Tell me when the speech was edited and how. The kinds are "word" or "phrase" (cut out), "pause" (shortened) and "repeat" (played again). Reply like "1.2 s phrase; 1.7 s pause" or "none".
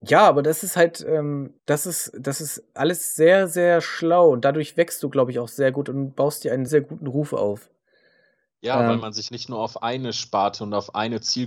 1.6 s pause; 6.7 s word; 9.3 s word

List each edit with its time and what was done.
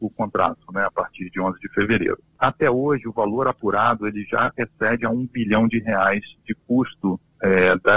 none

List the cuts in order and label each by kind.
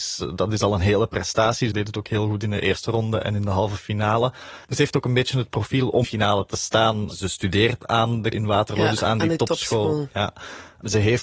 4.6 s pause; 6.0 s phrase; 8.3 s word

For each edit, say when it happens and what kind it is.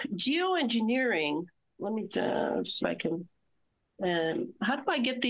1.8 s word; 2.1 s word; 2.8 s word

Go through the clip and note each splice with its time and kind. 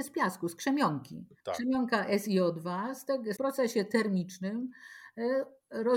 1.4 s pause; 3.4 s phrase

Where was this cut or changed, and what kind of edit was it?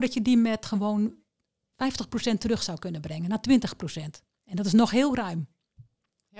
none

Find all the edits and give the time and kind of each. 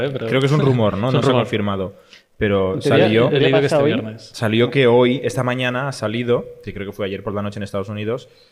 none

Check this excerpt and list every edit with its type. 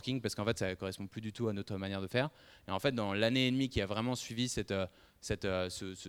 none

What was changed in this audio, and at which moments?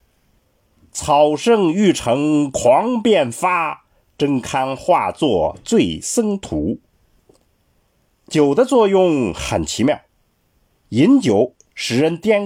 none

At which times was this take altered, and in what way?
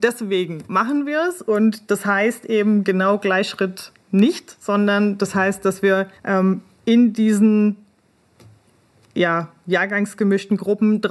6.2 s pause

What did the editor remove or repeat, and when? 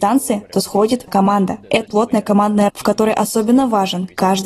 1.1 s word; 1.9 s word; 2.7 s word

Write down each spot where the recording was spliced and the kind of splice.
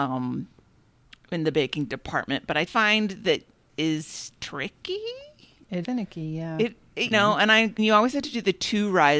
1.5 s word; 2.7 s word; 3.7 s word; 5.8 s word; 7.1 s word; 7.8 s word

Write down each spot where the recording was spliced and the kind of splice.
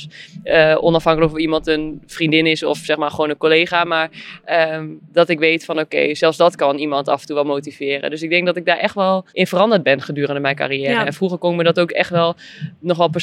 9.3 s pause

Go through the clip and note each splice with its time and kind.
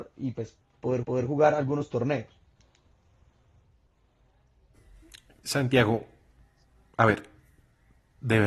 1.0 s repeat

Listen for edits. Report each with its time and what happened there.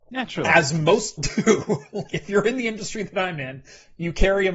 1.2 s word; 2.1 s word

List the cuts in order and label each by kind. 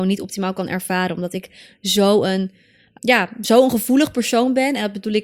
3.0 s word

